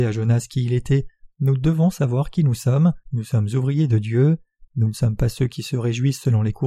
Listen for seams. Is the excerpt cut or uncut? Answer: cut